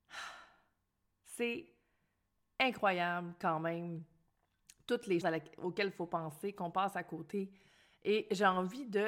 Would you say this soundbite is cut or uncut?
cut